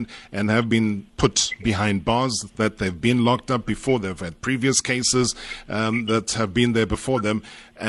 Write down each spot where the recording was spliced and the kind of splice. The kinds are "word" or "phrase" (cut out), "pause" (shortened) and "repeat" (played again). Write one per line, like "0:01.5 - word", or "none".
0:01.1 - pause